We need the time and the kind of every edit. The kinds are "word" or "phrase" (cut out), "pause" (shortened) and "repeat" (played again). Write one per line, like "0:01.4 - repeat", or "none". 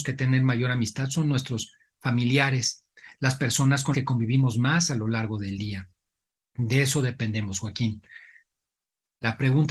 0:03.9 - word